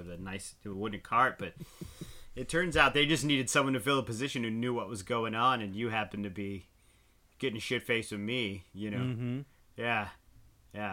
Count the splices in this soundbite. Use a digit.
0